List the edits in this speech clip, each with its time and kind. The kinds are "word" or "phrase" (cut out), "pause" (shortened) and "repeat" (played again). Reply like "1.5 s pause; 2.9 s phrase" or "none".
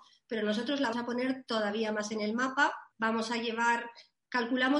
0.9 s word; 2.9 s pause